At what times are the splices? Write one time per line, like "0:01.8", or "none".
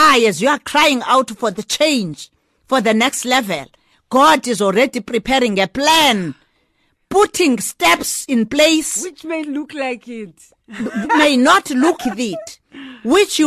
0:09.4
0:11.0
0:12.0